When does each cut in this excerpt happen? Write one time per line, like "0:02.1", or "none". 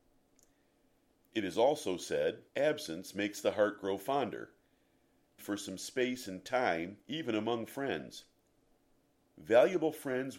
0:02.5
0:05.4
0:07.0